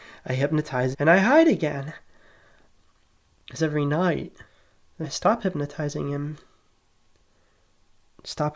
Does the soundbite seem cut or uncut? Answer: cut